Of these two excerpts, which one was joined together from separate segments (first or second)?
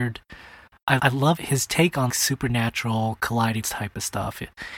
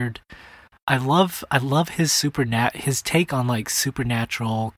first